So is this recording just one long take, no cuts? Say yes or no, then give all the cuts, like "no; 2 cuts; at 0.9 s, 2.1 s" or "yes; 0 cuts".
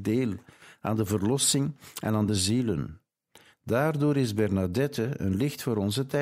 no; 1 cut; at 2.3 s